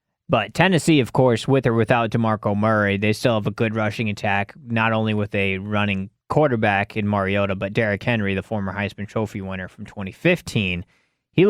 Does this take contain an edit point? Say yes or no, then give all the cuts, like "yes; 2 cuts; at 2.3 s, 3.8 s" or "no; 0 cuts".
yes; 1 cut; at 6.2 s